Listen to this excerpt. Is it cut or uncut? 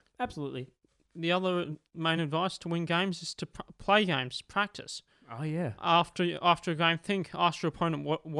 uncut